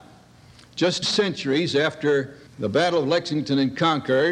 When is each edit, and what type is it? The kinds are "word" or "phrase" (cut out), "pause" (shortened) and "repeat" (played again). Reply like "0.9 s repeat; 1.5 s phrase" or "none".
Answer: 1.0 s word; 2.5 s pause